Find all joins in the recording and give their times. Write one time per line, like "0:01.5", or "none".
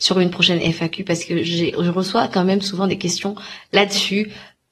none